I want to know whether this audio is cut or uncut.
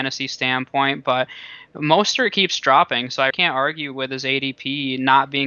cut